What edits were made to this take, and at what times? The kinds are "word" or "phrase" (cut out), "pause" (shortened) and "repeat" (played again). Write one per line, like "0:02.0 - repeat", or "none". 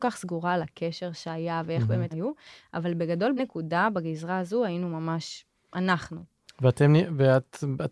0:02.1 - word
0:03.4 - word